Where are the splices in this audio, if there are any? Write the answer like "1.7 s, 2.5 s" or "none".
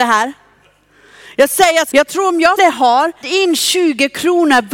1.9 s, 2.6 s, 3.2 s